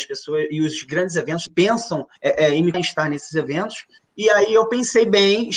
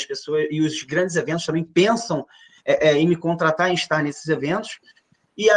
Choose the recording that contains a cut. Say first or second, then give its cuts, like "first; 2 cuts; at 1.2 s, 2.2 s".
first; 4 cuts; at 1.5 s, 2.2 s, 2.7 s, 4.0 s